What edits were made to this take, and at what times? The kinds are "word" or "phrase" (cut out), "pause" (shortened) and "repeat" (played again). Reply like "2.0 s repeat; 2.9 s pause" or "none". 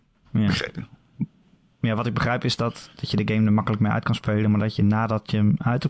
none